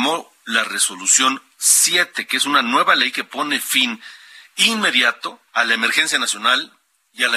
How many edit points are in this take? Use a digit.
1